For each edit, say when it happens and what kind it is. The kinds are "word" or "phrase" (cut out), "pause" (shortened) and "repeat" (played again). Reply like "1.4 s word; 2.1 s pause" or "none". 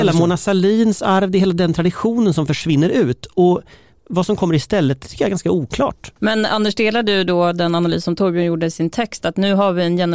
none